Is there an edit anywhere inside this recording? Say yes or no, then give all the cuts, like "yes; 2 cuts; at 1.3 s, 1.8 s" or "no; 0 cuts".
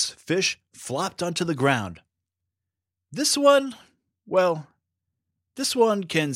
no; 0 cuts